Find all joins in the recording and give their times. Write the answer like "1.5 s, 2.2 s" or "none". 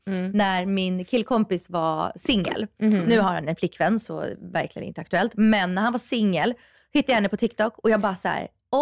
none